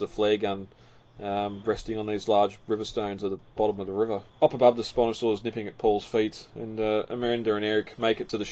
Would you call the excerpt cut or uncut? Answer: cut